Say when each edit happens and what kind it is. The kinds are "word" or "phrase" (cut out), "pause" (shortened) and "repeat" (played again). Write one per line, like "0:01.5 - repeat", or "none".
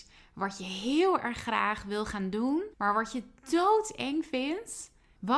0:02.7 - pause